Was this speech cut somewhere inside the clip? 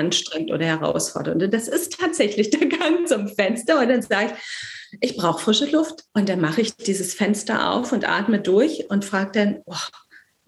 yes; 1 cut; at 6.1 s

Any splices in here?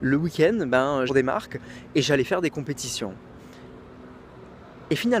yes; 1 cut; at 1.1 s

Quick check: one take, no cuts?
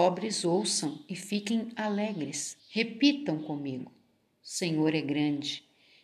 no; 1 cut; at 2.6 s

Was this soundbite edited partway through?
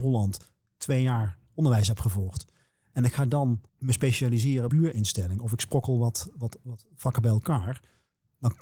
yes; 2 cuts; at 3.7 s, 4.7 s

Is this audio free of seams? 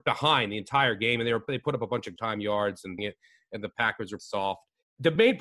no; 3 cuts; at 2.2 s, 3.0 s, 4.2 s

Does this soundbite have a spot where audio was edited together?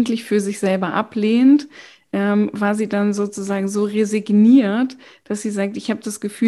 no; 0 cuts

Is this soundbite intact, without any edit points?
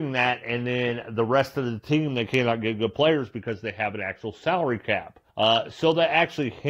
no; 1 cut; at 5.3 s

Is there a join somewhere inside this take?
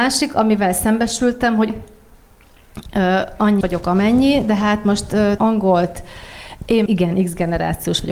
yes; 4 cuts; at 1.7 s, 3.6 s, 5.4 s, 6.9 s

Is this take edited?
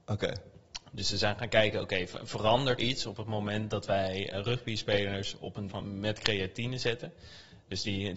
yes; 3 cuts; at 2.8 s, 4.3 s, 5.7 s

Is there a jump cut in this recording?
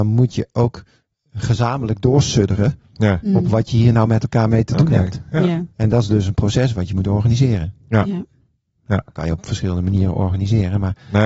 no; 0 cuts

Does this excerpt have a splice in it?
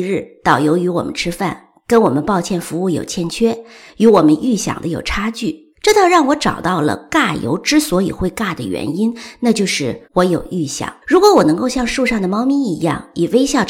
yes; 3 cuts; at 5.7 s, 10.0 s, 11.0 s

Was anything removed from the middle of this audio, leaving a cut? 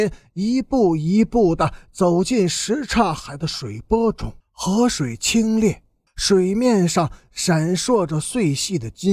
yes; 2 cuts; at 4.4 s, 6.1 s

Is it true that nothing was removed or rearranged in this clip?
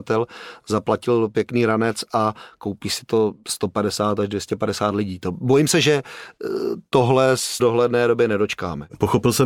no; 1 cut; at 7.6 s

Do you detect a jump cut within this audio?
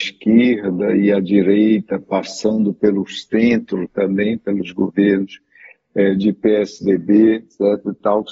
no; 0 cuts

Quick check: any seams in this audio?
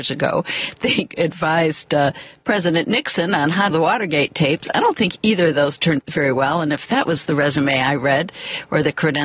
yes; 2 cuts; at 3.7 s, 6.0 s

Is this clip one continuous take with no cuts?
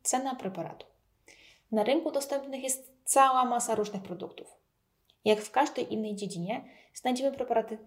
yes; 0 cuts

